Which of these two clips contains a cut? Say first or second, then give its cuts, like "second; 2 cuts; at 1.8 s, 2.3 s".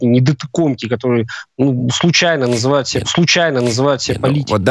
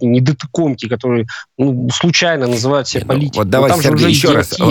first; 1 cut; at 3.0 s